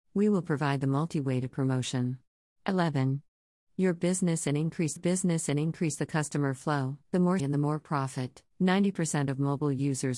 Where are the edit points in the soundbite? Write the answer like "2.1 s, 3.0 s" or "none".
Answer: 2.5 s, 5.0 s, 7.0 s, 7.4 s, 8.5 s